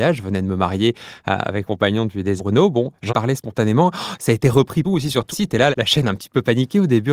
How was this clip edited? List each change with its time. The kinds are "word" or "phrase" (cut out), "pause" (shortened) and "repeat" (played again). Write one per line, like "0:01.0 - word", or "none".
0:01.7 - word
0:02.4 - word
0:03.1 - word
0:04.8 - word
0:05.3 - word
0:05.7 - word